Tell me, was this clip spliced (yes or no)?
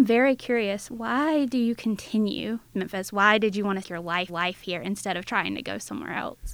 yes